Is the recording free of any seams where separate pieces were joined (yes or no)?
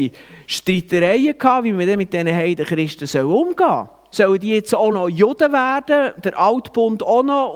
yes